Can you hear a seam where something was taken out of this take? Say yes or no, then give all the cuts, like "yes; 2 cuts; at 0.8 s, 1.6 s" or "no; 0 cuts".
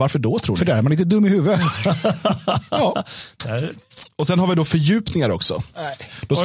no; 0 cuts